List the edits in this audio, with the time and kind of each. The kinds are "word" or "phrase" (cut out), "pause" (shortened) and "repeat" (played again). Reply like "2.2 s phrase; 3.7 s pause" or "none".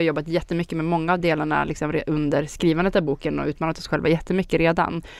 none